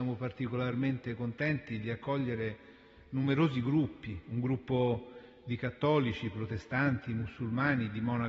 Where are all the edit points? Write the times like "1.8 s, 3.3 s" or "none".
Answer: none